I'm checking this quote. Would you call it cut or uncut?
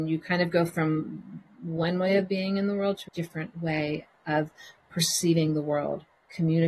cut